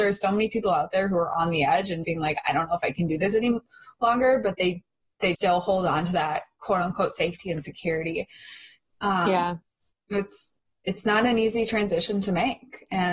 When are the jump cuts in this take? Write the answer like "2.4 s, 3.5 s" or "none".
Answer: 2.0 s, 5.3 s